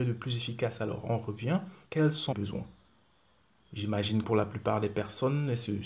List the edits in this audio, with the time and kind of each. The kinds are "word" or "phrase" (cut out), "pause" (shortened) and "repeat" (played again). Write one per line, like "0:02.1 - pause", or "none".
0:01.8 - pause
0:02.3 - word
0:04.2 - word